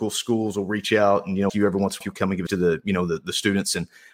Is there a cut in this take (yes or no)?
yes